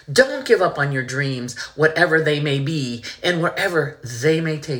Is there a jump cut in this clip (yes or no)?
no